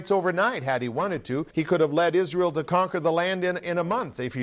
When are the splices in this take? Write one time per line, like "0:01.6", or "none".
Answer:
0:01.5